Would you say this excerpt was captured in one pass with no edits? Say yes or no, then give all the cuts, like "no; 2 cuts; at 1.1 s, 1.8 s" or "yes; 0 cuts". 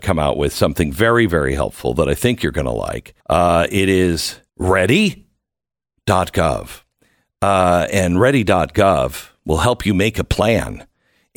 no; 2 cuts; at 3.2 s, 4.5 s